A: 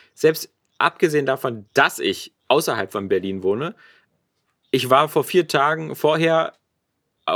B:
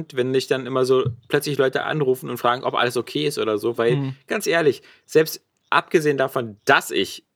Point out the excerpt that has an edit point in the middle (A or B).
A